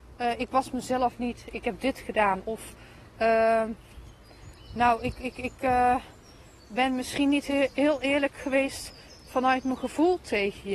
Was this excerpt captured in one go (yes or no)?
yes